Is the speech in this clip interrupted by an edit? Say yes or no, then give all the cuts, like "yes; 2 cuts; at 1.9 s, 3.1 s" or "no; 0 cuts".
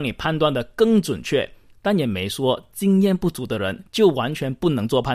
no; 0 cuts